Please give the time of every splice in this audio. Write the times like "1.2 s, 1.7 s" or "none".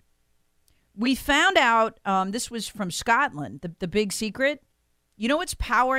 none